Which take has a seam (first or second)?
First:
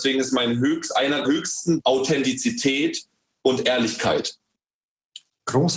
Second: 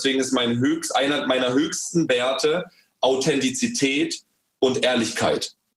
first